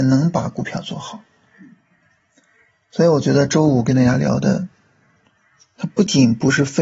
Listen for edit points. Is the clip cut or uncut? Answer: uncut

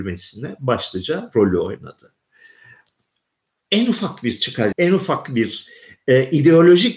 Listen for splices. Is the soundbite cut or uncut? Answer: cut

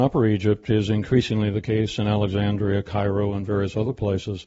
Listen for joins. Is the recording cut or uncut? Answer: uncut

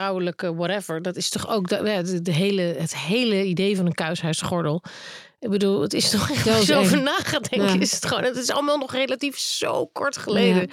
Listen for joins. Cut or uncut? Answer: uncut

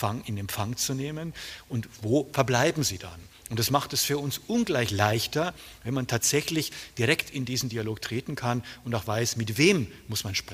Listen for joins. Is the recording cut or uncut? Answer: uncut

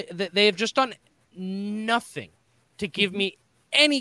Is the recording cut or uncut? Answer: uncut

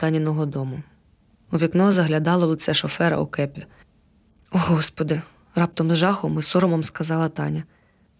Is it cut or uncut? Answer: uncut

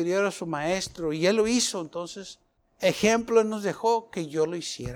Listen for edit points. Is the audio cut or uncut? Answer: uncut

